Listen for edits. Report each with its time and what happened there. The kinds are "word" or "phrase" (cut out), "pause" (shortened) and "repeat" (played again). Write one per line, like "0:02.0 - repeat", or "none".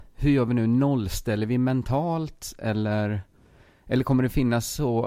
none